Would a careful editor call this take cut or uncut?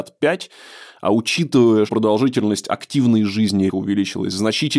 cut